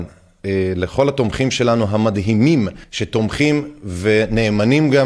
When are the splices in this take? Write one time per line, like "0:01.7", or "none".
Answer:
0:02.8

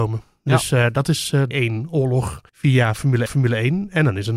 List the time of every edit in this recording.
0:01.5
0:02.5
0:03.3

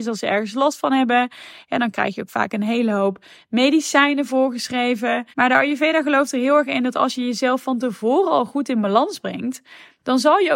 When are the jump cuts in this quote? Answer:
0:05.3

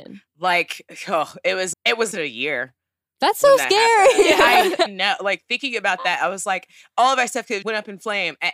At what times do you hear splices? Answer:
0:01.7
0:02.1
0:04.9
0:07.6

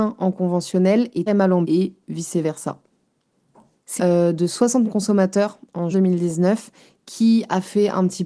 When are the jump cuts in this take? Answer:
0:01.3
0:01.6
0:04.0
0:04.8
0:05.9

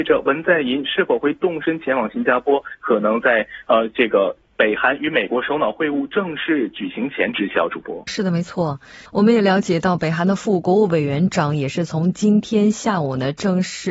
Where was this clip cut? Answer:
0:08.1
0:09.1

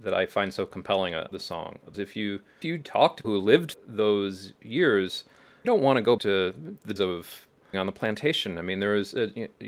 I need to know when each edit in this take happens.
0:01.3
0:01.9
0:02.6
0:03.2
0:03.7
0:05.6
0:06.2
0:07.0
0:07.7

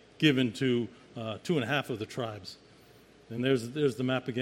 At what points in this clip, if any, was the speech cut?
none

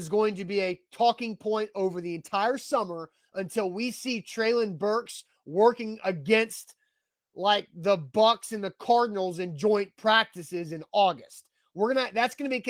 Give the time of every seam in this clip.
none

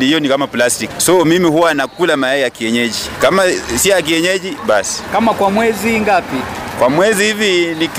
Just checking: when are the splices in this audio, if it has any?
none

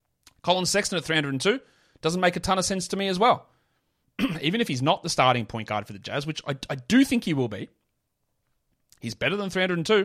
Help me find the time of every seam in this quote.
none

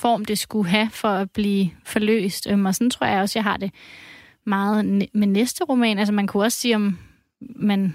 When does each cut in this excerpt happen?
none

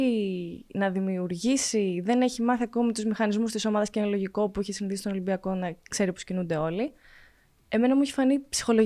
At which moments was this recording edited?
none

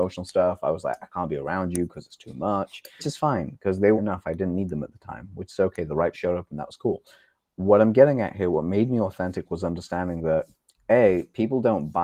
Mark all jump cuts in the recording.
0:03.0
0:03.9
0:06.1

